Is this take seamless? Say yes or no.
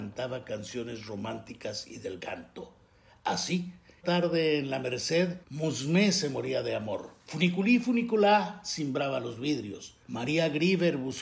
no